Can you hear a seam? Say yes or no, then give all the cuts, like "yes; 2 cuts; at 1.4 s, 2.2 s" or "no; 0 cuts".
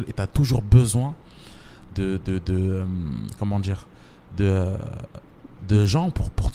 no; 0 cuts